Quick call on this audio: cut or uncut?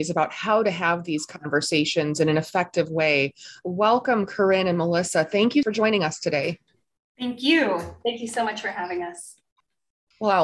uncut